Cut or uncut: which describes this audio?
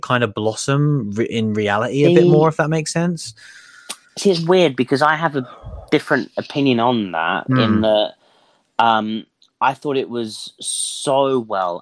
uncut